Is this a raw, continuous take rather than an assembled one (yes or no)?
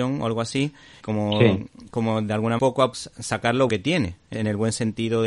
no